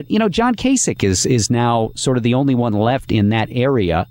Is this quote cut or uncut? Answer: uncut